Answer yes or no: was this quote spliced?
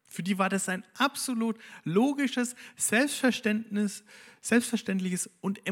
no